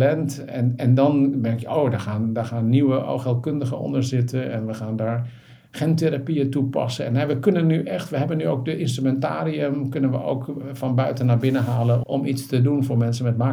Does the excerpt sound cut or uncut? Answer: cut